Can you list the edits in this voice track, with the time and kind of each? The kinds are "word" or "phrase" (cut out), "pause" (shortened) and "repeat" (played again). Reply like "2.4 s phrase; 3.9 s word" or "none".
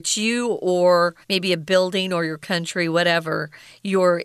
1.2 s pause